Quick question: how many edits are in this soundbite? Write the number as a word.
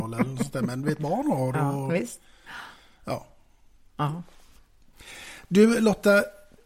one